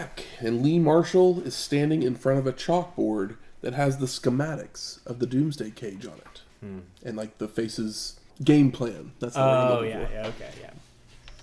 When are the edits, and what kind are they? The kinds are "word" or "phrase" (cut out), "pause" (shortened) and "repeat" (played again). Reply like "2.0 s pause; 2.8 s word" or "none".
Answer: 6.5 s pause; 8.3 s pause